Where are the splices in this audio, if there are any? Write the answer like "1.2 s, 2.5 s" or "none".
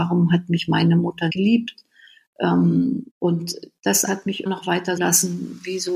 1.3 s, 3.1 s, 4.1 s, 4.5 s, 5.0 s